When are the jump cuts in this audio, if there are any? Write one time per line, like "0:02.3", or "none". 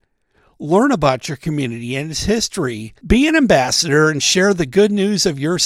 0:03.0